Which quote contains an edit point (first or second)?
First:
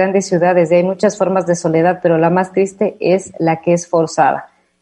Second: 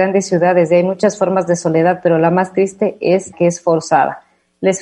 second